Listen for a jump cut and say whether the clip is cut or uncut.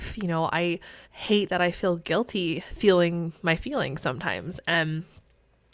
cut